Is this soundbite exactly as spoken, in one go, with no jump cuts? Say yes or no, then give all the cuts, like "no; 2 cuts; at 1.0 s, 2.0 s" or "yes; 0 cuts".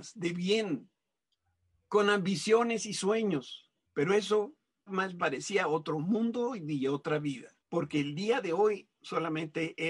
no; 4 cuts; at 3.9 s, 4.9 s, 5.2 s, 7.6 s